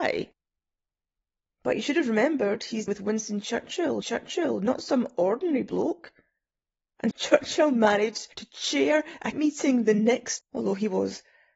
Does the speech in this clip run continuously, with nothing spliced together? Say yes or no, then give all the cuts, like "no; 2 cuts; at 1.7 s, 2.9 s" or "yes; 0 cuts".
no; 6 cuts; at 2.9 s, 4.0 s, 7.1 s, 8.3 s, 9.3 s, 10.4 s